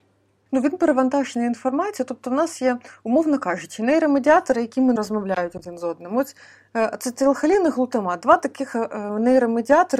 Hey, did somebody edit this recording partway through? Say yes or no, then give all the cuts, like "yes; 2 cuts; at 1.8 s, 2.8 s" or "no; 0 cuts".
yes; 1 cut; at 5.0 s